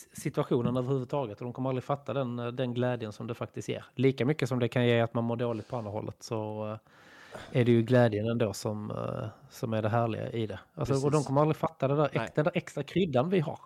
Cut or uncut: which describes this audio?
uncut